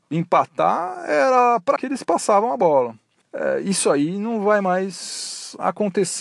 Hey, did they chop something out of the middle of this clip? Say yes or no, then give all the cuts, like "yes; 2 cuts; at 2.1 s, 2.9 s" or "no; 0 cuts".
yes; 2 cuts; at 1.8 s, 3.2 s